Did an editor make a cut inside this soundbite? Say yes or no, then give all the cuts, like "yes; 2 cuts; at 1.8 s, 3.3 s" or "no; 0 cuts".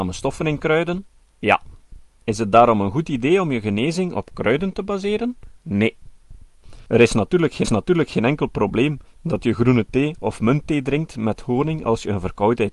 yes; 3 cuts; at 1.2 s, 5.6 s, 7.6 s